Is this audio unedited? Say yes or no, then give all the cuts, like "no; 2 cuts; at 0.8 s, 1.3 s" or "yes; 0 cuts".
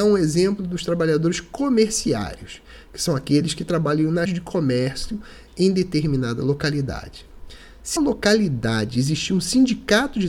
no; 2 cuts; at 4.3 s, 8.0 s